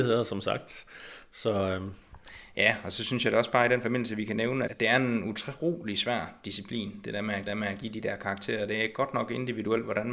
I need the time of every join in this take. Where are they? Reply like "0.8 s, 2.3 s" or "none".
4.7 s, 7.5 s